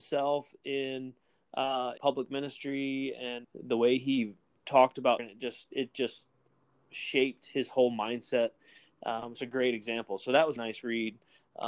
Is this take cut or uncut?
cut